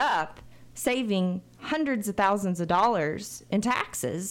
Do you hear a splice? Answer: no; 0 cuts

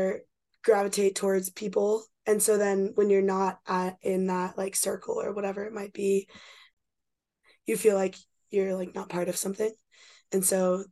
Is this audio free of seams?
yes; 0 cuts

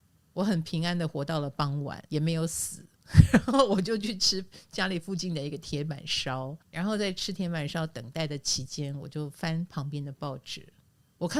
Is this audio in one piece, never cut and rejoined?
no; 2 cuts; at 2.1 s, 6.6 s

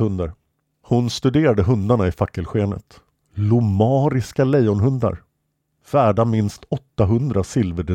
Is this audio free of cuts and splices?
yes; 0 cuts

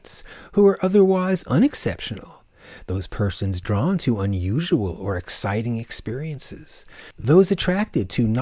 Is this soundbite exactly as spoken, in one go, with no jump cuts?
yes; 0 cuts

